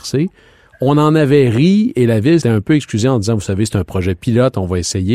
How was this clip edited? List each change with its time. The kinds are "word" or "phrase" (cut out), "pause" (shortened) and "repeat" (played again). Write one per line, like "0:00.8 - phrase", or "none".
0:02.4 - word